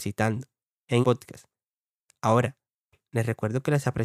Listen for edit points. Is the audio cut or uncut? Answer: cut